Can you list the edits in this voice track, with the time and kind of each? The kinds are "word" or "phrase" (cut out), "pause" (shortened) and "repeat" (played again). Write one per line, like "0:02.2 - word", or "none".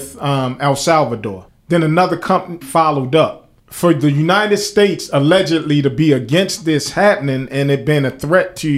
0:01.5 - pause
0:02.6 - word
0:03.6 - pause